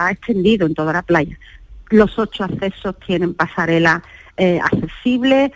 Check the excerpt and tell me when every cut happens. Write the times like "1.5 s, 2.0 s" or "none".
none